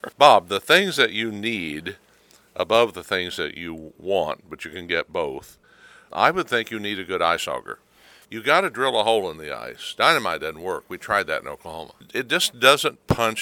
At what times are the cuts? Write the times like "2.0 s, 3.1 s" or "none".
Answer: 6.1 s